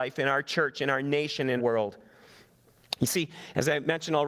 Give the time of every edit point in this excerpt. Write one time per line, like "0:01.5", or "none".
0:01.6